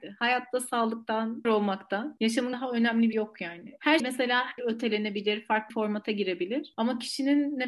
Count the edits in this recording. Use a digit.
6